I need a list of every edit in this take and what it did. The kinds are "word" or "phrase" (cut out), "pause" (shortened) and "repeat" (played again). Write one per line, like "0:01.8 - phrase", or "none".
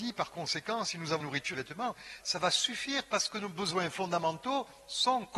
0:01.2 - word
0:01.5 - phrase
0:02.2 - word